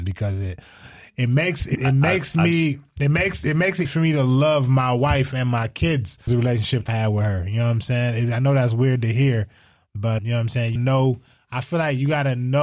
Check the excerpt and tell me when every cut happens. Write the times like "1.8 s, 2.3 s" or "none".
1.7 s, 3.8 s, 6.3 s, 6.9 s, 10.2 s, 10.8 s